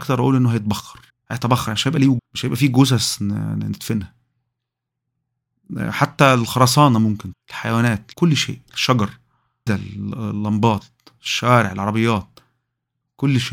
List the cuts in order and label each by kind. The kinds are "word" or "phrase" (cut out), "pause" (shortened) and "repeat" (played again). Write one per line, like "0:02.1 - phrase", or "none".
0:01.1 - pause
0:02.2 - phrase
0:07.3 - word
0:08.1 - word
0:09.7 - word